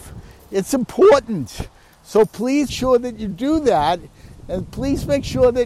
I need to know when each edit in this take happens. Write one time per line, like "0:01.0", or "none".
0:02.7

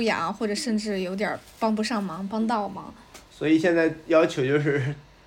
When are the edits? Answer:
0:03.3

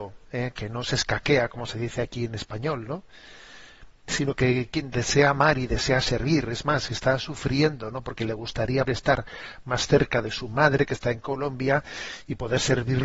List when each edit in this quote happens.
0:08.9

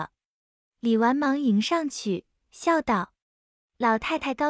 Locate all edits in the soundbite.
0:03.2

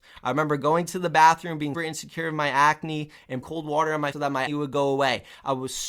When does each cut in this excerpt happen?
0:01.7
0:03.4
0:04.1
0:04.5

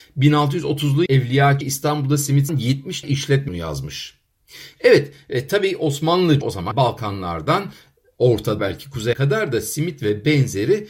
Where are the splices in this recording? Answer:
0:01.1
0:01.6
0:02.5
0:03.0
0:03.5
0:06.4
0:06.7
0:08.6
0:09.1

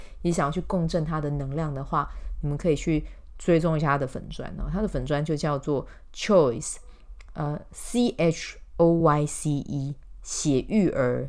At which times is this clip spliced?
none

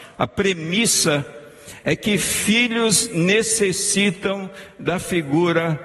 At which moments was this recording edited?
none

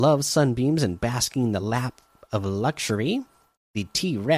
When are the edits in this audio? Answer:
none

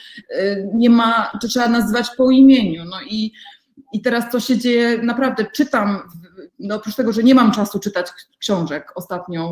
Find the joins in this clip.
0:06.5

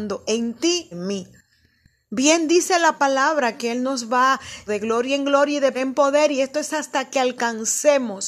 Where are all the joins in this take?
0:00.9
0:04.7
0:05.7

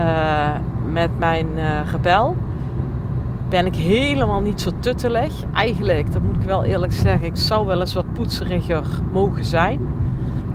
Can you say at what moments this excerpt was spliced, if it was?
none

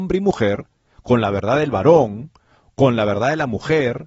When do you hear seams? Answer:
none

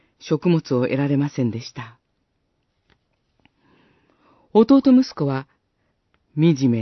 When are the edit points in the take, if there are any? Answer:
none

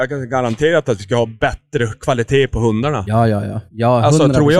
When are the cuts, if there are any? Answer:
0:03.7

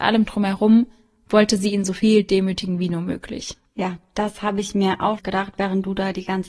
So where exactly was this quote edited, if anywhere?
0:05.2

